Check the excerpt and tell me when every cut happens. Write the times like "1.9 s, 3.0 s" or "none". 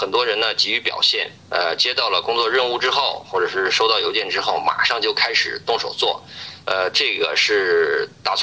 1.4 s, 6.6 s